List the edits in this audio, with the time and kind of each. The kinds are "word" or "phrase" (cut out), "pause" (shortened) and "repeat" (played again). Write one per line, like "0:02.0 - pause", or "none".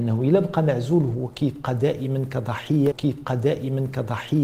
0:02.9 - repeat